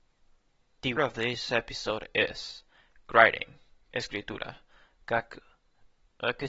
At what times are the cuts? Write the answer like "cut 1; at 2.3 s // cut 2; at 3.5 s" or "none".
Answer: cut 1; at 1.0 s